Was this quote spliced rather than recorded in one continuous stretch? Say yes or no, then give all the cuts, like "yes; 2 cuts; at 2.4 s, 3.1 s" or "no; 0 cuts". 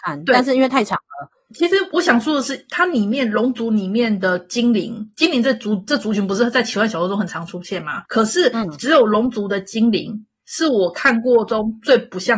yes; 1 cut; at 8.1 s